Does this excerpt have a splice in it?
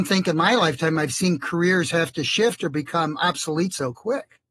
no; 0 cuts

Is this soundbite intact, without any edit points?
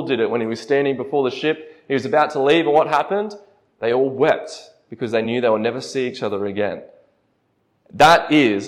yes; 0 cuts

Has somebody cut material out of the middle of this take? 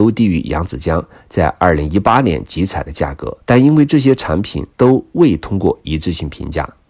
yes; 2 cuts; at 3.4 s, 4.7 s

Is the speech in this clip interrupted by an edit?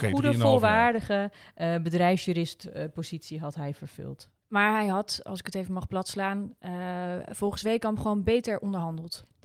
no; 0 cuts

